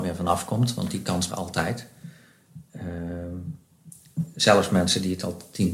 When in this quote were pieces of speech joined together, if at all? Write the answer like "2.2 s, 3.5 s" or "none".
1.3 s